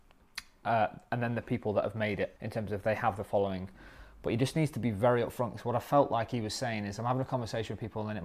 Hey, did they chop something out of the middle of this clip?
yes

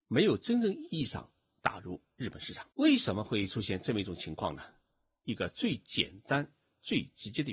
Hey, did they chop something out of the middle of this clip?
yes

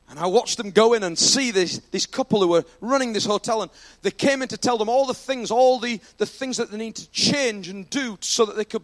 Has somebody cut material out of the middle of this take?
no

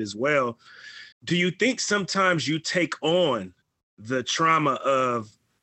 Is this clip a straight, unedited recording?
no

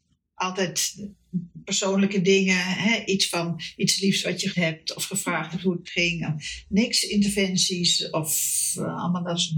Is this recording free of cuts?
no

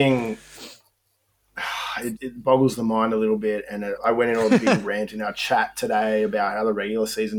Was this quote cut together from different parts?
yes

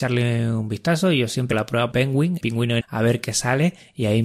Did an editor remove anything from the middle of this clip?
yes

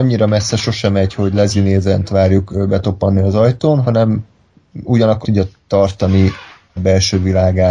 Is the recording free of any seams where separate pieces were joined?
no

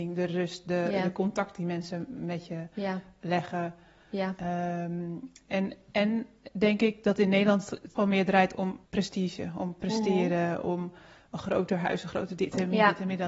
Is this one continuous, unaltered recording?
no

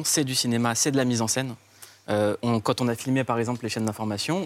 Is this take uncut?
yes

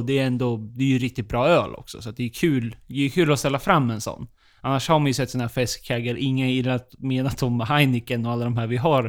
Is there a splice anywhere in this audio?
no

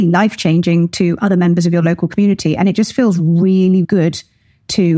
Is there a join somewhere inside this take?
yes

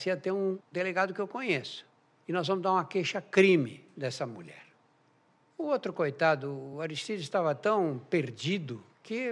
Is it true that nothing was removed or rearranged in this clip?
yes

